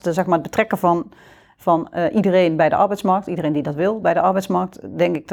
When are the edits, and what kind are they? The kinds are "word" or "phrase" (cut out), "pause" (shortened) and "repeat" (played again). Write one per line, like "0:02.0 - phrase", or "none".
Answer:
none